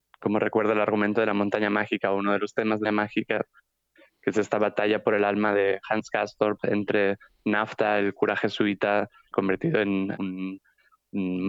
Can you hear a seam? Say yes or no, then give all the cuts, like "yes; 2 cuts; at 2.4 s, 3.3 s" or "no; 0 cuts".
yes; 3 cuts; at 2.8 s, 9.3 s, 10.2 s